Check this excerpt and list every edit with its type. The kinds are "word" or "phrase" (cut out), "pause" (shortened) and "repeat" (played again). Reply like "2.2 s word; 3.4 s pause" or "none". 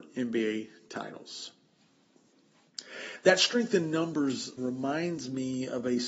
4.6 s word